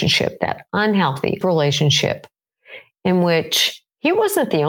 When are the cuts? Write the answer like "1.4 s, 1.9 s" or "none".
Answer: 1.4 s